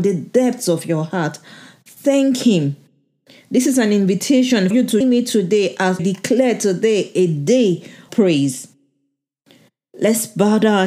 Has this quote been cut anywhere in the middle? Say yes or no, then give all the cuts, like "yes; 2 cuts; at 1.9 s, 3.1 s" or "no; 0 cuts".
yes; 4 cuts; at 4.7 s, 5.0 s, 6.0 s, 8.1 s